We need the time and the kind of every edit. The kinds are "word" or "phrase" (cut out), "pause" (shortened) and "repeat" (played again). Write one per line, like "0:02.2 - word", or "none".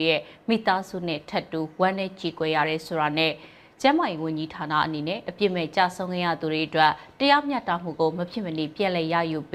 none